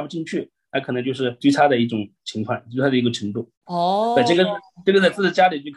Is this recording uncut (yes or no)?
no